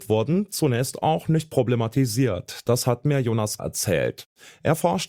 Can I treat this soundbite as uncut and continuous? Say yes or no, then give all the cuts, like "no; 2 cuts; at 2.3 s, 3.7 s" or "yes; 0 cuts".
no; 1 cut; at 3.6 s